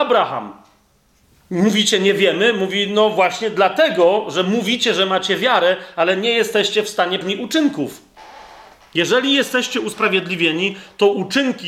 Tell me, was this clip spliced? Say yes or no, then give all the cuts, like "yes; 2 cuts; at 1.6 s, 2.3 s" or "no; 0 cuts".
yes; 2 cuts; at 1.2 s, 7.2 s